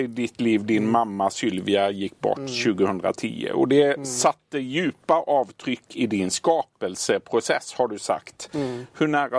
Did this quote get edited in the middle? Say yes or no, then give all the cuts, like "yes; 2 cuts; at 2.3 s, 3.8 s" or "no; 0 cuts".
no; 0 cuts